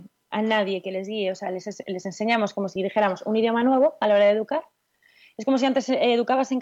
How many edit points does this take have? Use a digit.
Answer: 0